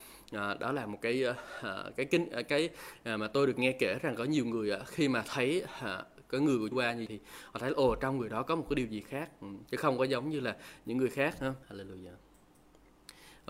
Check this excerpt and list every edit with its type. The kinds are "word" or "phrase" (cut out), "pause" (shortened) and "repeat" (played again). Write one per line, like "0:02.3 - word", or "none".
0:06.7 - phrase
0:07.1 - word
0:11.6 - pause